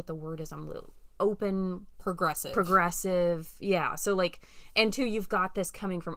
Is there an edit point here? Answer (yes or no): no